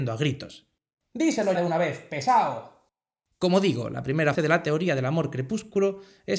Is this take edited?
yes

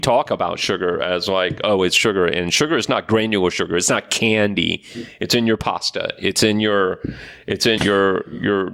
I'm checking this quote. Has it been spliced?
yes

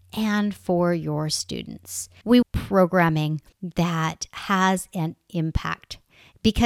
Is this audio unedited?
no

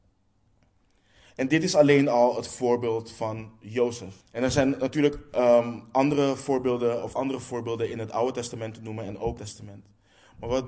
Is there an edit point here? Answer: yes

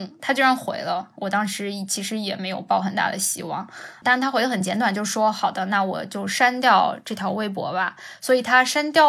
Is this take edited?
no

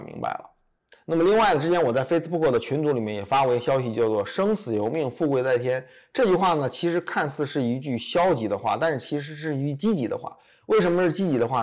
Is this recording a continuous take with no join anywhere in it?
yes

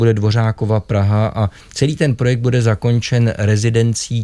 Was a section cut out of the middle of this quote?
no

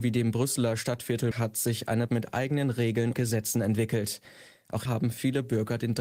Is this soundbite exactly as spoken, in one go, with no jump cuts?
no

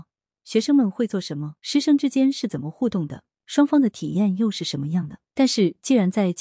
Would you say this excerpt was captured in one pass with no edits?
no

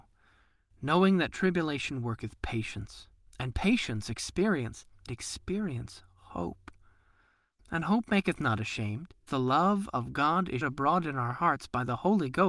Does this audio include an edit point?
yes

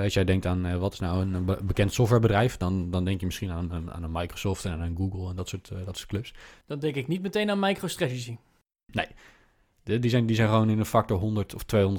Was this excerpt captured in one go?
yes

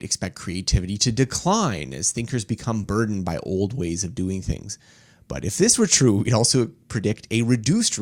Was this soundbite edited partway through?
no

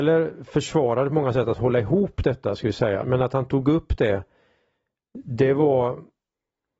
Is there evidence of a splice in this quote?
yes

